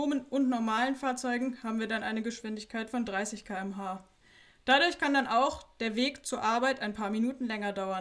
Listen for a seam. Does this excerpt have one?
no; 0 cuts

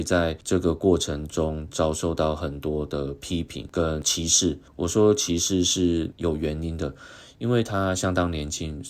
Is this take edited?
yes; 1 cut; at 4.7 s

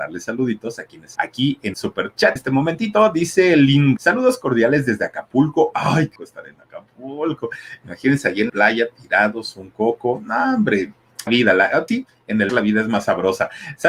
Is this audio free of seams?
no; 9 cuts; at 1.2 s, 1.7 s, 2.4 s, 4.0 s, 6.2 s, 8.5 s, 11.3 s, 11.9 s, 12.5 s

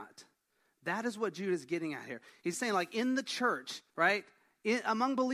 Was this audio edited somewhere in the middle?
yes; 2 cuts; at 2.5 s, 3.9 s

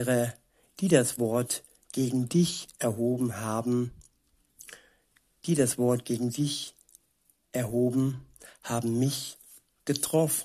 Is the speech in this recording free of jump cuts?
yes; 0 cuts

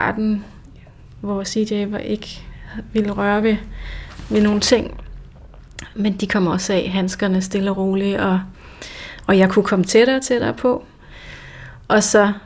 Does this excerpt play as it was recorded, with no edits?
yes; 0 cuts

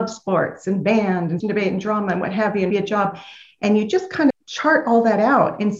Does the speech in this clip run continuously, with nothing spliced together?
no; 3 cuts; at 1.4 s, 2.7 s, 4.3 s

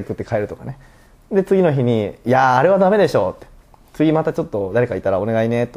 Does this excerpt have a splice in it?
no; 0 cuts

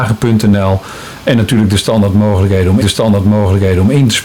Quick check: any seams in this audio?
yes; 1 cut; at 2.8 s

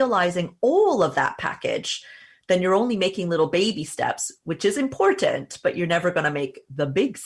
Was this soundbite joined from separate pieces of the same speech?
no; 0 cuts

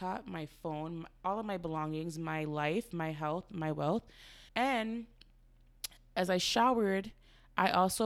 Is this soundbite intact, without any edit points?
no; 1 cut; at 4.5 s

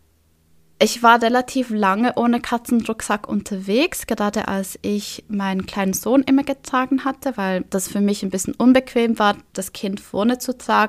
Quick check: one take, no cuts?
yes; 0 cuts

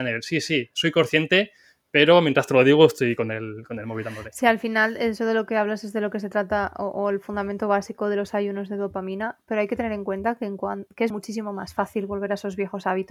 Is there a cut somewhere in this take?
yes; 1 cut; at 11.1 s

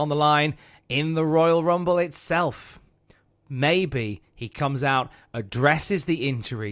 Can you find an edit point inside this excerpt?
no; 0 cuts

